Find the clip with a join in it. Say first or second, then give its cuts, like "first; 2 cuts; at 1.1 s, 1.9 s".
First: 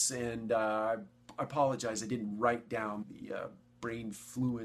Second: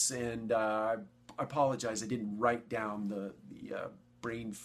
first; 1 cut; at 3.0 s